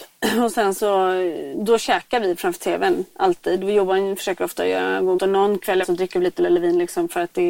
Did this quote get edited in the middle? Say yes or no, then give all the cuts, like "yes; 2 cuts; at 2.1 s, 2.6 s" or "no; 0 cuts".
yes; 3 cuts; at 5.2 s, 5.8 s, 6.4 s